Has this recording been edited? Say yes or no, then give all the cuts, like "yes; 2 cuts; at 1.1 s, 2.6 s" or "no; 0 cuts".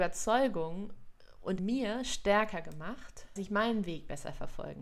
yes; 2 cuts; at 1.6 s, 3.4 s